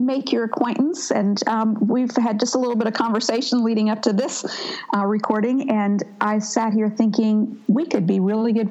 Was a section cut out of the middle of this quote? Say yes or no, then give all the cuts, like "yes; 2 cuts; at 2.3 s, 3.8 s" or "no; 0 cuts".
no; 0 cuts